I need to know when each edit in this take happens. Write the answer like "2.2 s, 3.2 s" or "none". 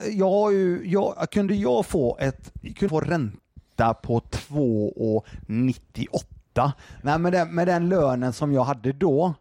2.9 s